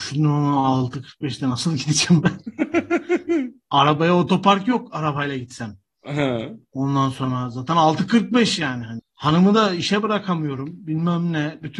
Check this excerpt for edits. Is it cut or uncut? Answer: uncut